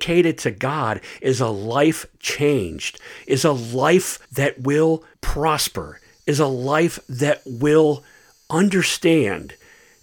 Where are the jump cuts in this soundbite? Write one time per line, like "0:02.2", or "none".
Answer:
0:04.2
0:05.1